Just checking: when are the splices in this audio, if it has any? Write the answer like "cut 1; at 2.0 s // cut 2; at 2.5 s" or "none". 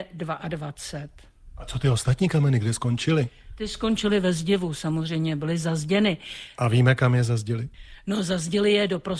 none